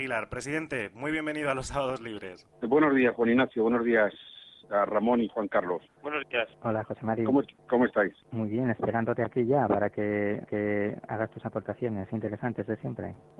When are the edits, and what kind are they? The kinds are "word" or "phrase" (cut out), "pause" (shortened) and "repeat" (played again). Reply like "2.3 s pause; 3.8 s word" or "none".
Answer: 2.5 s pause; 8.2 s pause; 10.5 s repeat